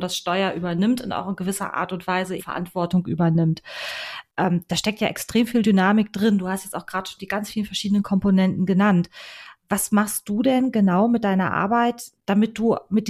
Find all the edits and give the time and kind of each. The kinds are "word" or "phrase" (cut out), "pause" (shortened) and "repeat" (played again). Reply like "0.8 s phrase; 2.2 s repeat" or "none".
2.4 s word; 12.2 s pause